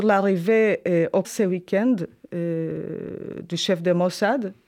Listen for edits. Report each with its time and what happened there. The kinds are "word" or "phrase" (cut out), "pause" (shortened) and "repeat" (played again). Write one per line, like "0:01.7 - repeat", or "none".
0:01.2 - word